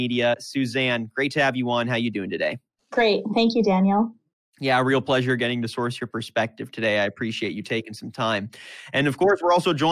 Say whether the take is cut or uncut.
uncut